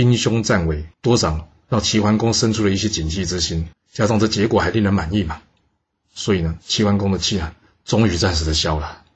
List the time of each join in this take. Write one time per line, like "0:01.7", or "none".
0:00.9
0:03.7